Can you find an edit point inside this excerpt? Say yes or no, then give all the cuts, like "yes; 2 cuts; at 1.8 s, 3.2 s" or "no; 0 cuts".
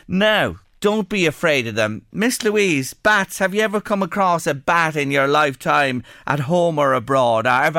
no; 0 cuts